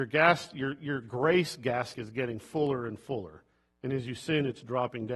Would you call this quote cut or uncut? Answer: cut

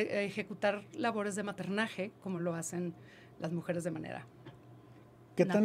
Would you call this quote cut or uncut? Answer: uncut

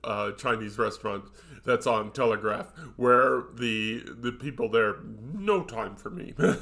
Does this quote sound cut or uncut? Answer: uncut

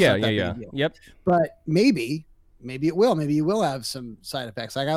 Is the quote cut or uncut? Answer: uncut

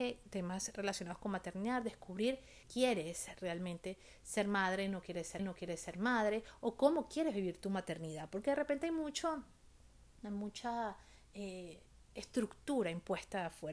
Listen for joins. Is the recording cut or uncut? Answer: cut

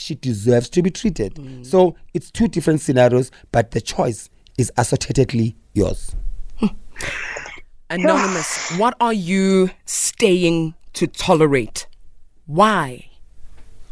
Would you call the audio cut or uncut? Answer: uncut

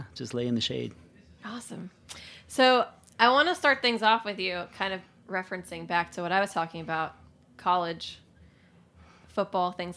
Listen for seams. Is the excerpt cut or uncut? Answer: uncut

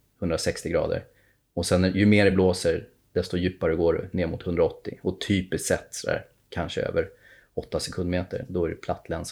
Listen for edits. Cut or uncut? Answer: uncut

